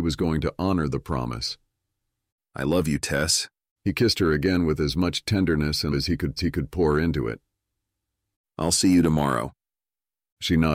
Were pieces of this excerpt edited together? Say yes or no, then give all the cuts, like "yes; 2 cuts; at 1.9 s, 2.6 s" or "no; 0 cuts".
yes; 2 cuts; at 5.9 s, 6.4 s